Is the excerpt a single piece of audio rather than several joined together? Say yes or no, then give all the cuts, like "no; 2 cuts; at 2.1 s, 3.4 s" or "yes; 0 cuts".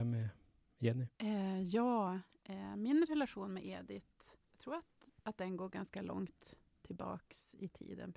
no; 2 cuts; at 1.1 s, 4.4 s